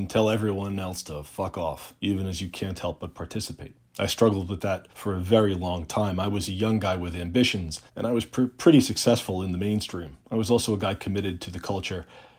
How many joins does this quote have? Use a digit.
5